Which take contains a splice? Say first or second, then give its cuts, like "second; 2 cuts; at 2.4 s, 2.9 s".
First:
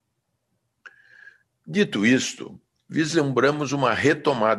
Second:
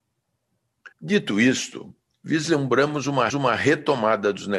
second; 2 cuts; at 0.9 s, 3.3 s